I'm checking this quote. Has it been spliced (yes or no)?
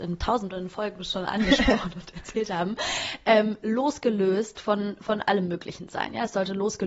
no